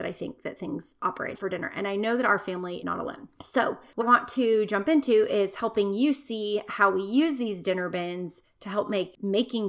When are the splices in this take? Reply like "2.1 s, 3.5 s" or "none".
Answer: 1.3 s, 2.8 s, 4.0 s